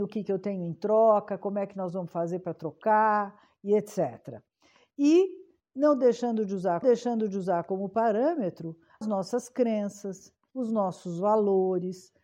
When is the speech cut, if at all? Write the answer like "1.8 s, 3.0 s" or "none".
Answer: 6.8 s, 9.0 s